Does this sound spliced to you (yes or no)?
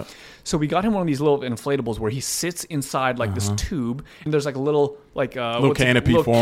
yes